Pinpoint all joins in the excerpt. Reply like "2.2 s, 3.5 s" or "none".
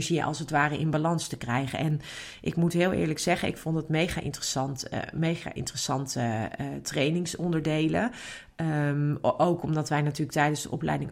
none